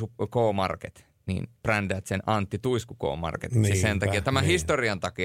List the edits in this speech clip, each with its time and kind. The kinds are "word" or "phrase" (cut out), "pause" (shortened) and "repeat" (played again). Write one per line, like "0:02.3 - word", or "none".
0:01.5 - word

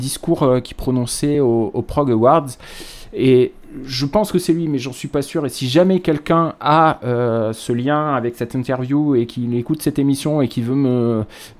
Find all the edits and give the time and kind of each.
none

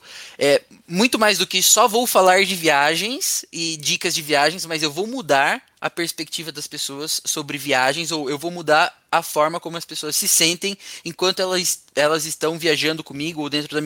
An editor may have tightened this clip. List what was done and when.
none

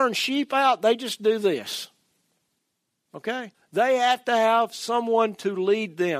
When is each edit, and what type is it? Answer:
0:03.5 - pause

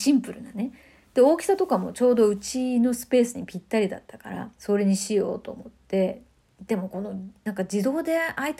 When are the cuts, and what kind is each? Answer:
0:04.5 - pause

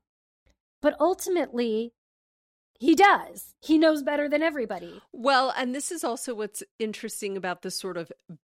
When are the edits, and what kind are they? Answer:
none

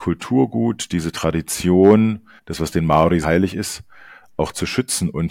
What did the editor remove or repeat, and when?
0:02.4 - pause
0:03.2 - word

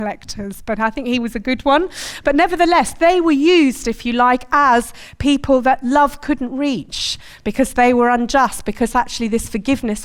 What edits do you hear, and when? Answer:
none

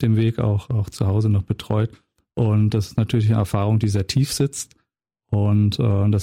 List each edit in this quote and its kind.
none

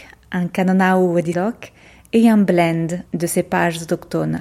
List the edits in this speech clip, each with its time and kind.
0:01.3 - word
0:03.1 - pause

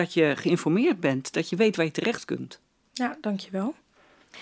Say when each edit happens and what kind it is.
none

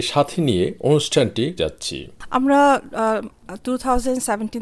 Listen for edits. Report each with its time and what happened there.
0:01.6 - word

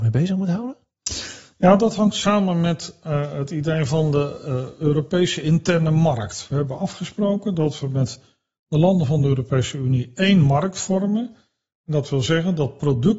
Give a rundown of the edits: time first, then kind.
none

